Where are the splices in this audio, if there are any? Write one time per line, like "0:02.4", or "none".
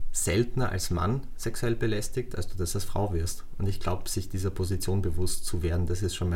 none

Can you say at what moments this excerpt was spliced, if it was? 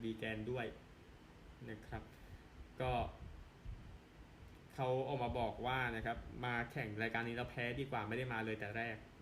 none

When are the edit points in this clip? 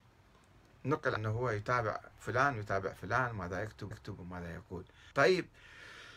0:01.2
0:02.1
0:03.9
0:05.1

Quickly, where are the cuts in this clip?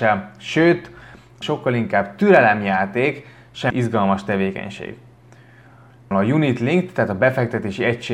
0:01.4
0:03.7
0:06.1

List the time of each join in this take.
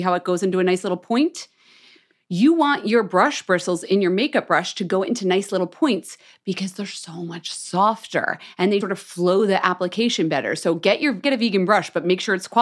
0:08.8
0:11.2

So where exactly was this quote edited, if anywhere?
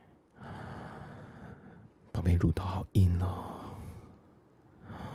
none

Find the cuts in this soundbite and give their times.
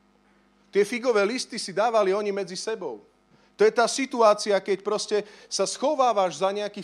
0:03.3

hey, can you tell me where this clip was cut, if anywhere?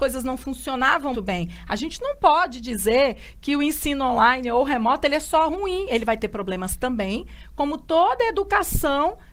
0:01.1

